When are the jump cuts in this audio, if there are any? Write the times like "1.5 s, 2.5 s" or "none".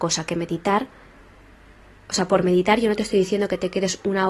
none